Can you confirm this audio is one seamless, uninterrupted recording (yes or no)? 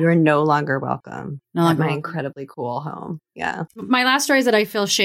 no